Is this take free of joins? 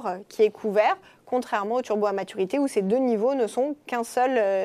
yes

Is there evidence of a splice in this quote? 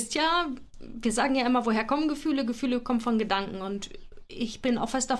no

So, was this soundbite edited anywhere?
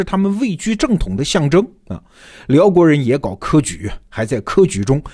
no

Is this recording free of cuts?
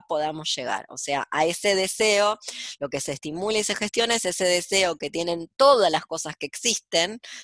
yes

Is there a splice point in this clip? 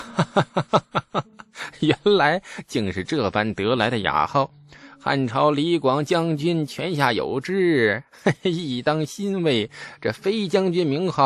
no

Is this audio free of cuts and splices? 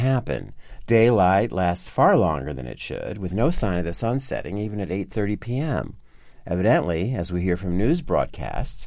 yes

